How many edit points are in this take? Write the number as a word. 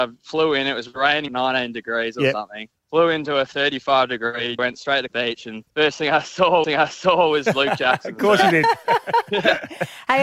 six